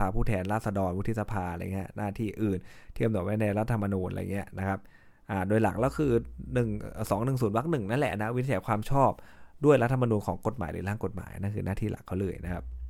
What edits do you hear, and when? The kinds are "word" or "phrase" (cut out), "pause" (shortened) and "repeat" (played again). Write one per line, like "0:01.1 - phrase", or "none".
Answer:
none